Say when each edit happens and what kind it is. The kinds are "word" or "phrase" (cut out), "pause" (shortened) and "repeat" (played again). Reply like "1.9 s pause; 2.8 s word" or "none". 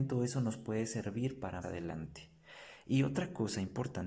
1.6 s word